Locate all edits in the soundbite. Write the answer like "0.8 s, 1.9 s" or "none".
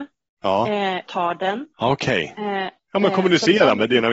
1.1 s, 1.7 s